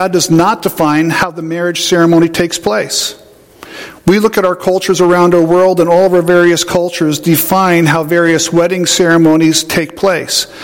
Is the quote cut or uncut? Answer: uncut